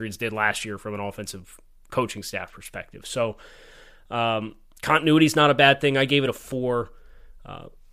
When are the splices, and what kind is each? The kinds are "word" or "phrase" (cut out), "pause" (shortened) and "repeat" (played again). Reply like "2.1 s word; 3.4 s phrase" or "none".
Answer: none

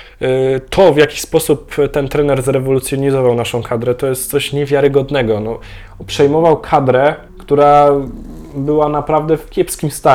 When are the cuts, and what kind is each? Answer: 7.3 s pause

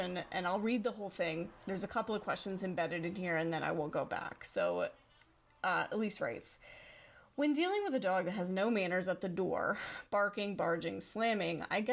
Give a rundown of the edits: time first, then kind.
none

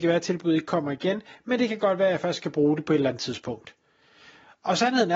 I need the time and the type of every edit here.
none

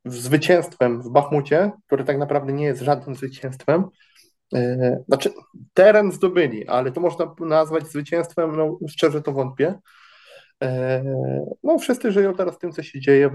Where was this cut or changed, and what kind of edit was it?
1.8 s pause; 5.7 s pause; 6.9 s phrase

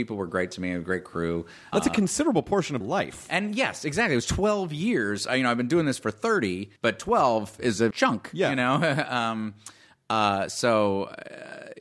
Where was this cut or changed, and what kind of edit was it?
1.7 s word; 2.8 s word; 5.3 s word; 6.8 s pause; 7.9 s word

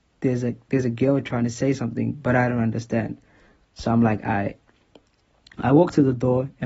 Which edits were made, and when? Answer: none

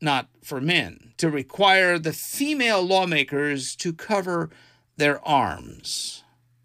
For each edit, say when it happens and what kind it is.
none

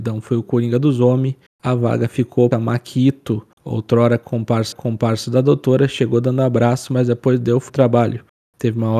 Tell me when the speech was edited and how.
2.5 s phrase; 4.7 s repeat; 7.7 s word

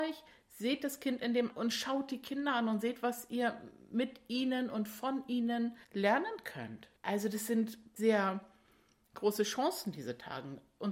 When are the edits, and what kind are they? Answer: 1.5 s word; 5.8 s pause; 7.0 s pause; 8.0 s word

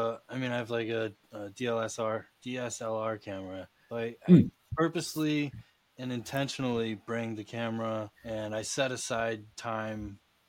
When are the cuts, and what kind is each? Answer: 1.2 s pause; 3.9 s word; 8.1 s pause

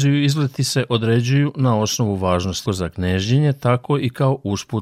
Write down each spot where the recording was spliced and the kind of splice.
2.7 s phrase

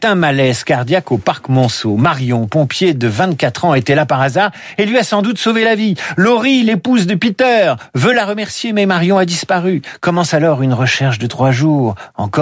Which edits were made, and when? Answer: none

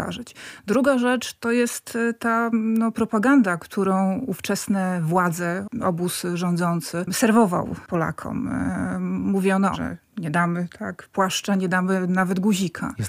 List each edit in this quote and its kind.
9.7 s phrase

